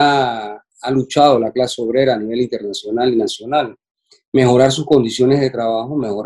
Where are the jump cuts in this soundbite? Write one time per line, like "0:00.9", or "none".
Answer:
none